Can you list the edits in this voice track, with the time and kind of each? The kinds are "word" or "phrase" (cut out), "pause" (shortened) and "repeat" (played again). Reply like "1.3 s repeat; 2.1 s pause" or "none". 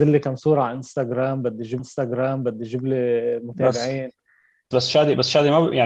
1.8 s repeat; 4.7 s word